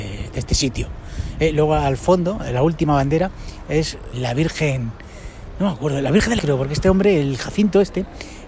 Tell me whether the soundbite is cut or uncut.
cut